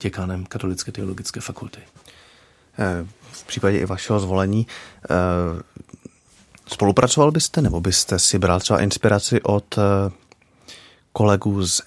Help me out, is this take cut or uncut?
uncut